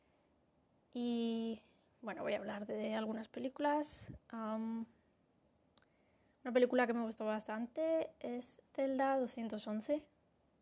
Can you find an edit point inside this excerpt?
no; 0 cuts

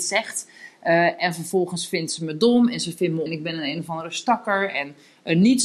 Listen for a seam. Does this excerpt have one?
yes; 1 cut; at 3.3 s

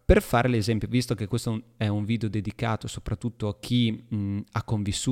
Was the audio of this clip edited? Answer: no; 0 cuts

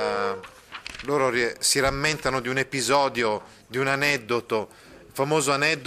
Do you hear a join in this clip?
no; 0 cuts

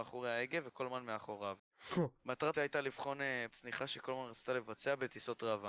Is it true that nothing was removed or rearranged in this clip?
no; 3 cuts; at 1.6 s, 2.5 s, 3.5 s

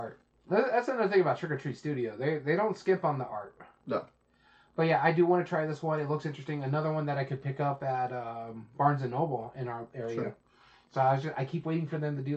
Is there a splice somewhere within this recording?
no; 0 cuts

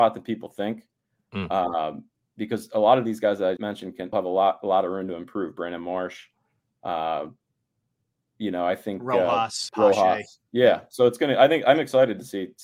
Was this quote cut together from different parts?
yes; 3 cuts; at 3.6 s, 4.1 s, 9.7 s

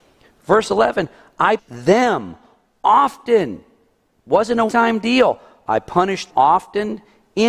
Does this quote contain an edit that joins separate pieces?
yes; 3 cuts; at 1.6 s, 4.7 s, 6.3 s

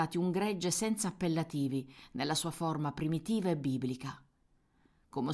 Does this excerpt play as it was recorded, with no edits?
yes; 0 cuts

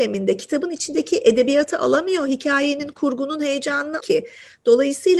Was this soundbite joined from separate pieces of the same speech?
yes; 1 cut; at 4.0 s

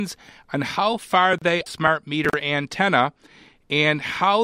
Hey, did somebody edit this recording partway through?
yes; 1 cut; at 1.7 s

